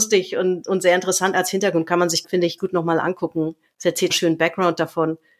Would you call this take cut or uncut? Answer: cut